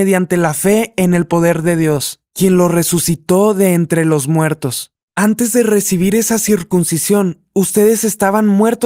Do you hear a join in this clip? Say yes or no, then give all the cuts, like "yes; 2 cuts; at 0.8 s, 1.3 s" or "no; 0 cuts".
yes; 1 cut; at 5.0 s